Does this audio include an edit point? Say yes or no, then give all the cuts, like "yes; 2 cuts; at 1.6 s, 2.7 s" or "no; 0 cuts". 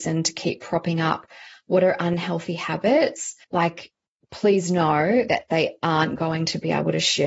yes; 1 cut; at 3.4 s